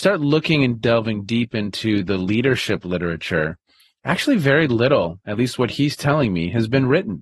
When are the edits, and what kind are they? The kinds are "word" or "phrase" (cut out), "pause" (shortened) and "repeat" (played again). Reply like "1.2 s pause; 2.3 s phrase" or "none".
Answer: none